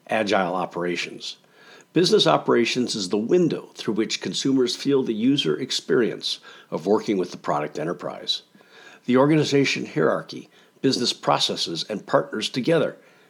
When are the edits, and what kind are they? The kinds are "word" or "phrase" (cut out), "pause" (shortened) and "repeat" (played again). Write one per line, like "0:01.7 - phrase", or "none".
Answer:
none